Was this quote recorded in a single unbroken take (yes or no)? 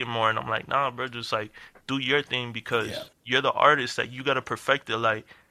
no